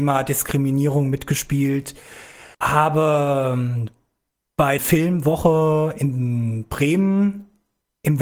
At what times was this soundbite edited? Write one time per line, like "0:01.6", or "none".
0:02.5
0:04.8